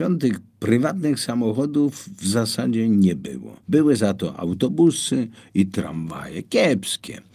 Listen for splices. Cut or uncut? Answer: cut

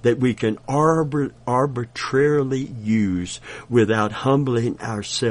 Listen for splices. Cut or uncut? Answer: uncut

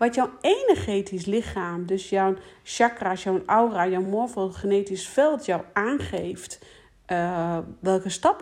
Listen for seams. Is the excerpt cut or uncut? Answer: uncut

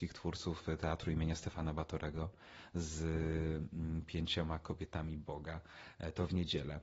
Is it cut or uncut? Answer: uncut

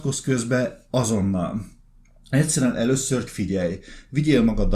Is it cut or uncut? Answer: cut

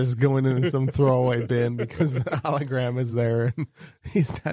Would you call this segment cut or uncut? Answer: uncut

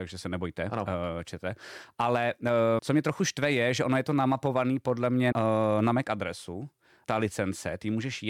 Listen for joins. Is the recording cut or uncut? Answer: cut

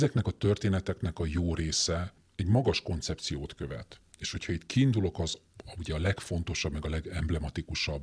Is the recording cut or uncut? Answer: uncut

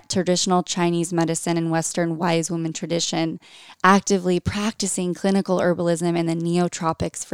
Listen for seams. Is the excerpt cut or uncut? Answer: uncut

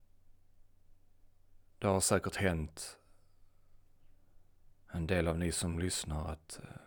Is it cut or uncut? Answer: uncut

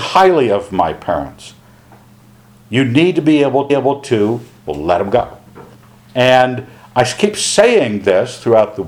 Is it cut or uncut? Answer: cut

